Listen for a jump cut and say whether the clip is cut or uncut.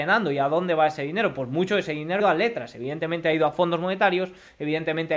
cut